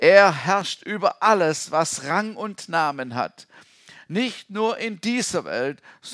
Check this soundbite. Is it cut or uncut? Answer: uncut